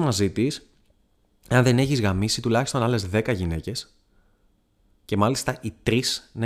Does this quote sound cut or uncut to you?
uncut